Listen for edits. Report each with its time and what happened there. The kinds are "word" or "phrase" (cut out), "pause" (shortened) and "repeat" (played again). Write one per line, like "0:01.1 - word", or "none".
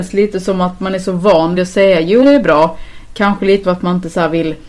0:01.6 - word
0:02.2 - word
0:03.6 - word